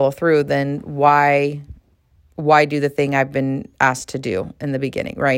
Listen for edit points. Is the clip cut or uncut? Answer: uncut